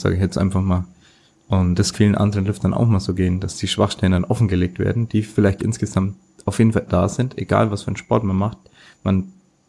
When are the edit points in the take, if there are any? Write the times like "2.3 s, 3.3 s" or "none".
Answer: 1.9 s, 5.6 s, 6.9 s